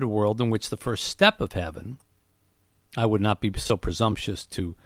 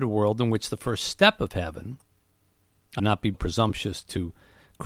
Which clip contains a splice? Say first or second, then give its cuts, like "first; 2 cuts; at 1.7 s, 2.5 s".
second; 2 cuts; at 3.0 s, 3.3 s